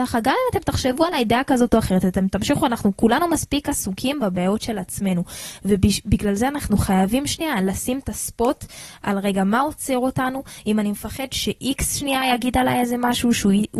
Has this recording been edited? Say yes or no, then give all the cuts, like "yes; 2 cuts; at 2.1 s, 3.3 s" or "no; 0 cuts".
no; 0 cuts